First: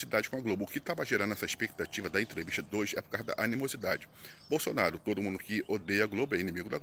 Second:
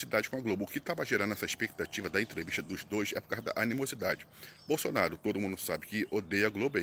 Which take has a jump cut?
first; 2 cuts; at 2.7 s, 5.4 s

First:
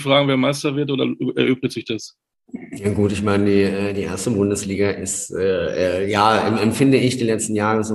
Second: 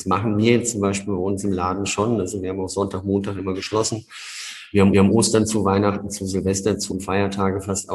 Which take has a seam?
second; 2 cuts; at 4.9 s, 6.9 s

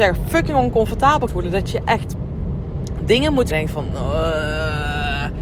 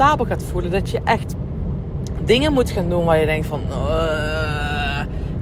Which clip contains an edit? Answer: first; 2 cuts; at 1.3 s, 3.5 s

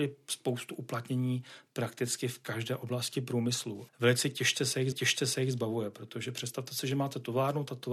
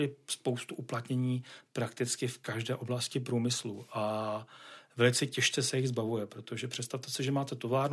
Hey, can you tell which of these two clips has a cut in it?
first; 2 cuts; at 3.9 s, 4.9 s

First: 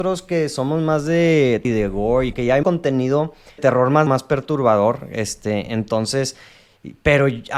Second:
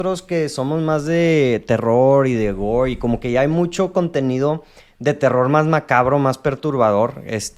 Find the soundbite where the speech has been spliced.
first; 5 cuts; at 1.6 s, 2.3 s, 2.6 s, 3.6 s, 4.1 s

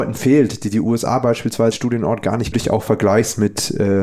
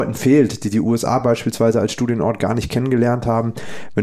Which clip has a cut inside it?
first; 2 cuts; at 1.7 s, 2.5 s

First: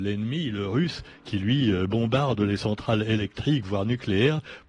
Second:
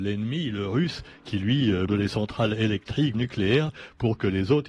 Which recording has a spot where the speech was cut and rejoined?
second; 2 cuts; at 1.9 s, 3.1 s

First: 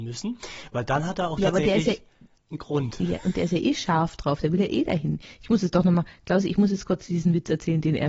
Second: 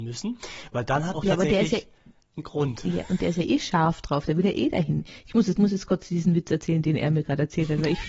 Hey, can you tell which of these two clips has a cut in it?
second; 2 cuts; at 1.1 s, 5.6 s

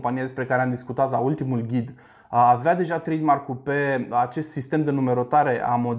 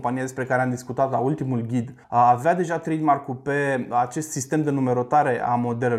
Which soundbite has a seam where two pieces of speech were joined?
second; 1 cut; at 2.0 s

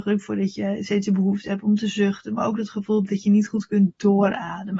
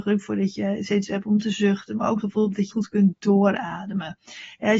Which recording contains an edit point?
second; 3 cuts; at 1.1 s, 2.2 s, 2.7 s

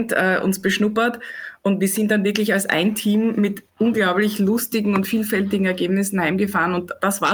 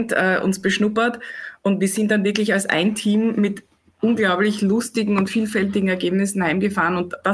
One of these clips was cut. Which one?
first; 1 cut; at 3.7 s

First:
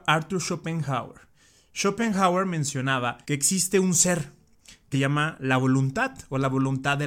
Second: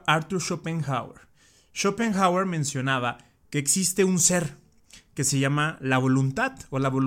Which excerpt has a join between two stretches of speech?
first; 2 cuts; at 3.2 s, 4.9 s

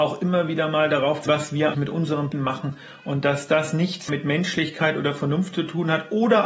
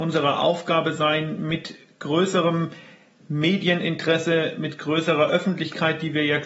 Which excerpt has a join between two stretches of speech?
first; 4 cuts; at 1.3 s, 1.7 s, 2.3 s, 4.1 s

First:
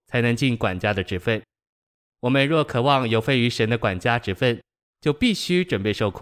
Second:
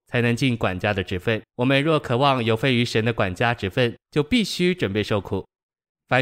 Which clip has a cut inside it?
second; 2 cuts; at 1.5 s, 4.0 s

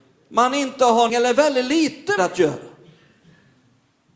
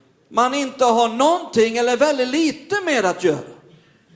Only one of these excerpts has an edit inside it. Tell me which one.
first; 2 cuts; at 1.1 s, 2.2 s

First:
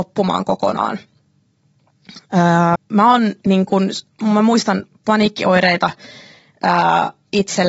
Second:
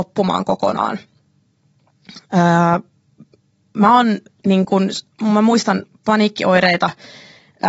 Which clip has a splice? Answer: first; 2 cuts; at 2.8 s, 3.4 s

